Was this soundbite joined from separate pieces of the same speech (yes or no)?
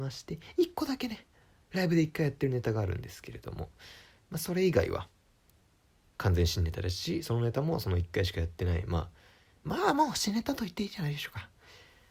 no